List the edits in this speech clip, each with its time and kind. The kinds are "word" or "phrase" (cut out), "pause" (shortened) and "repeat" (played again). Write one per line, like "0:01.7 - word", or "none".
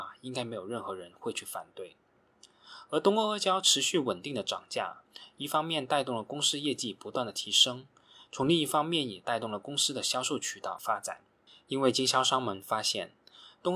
none